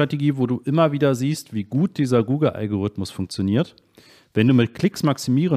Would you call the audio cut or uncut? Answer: uncut